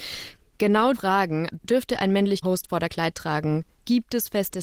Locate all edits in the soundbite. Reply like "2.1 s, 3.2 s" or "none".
0.9 s, 1.5 s, 2.4 s, 2.9 s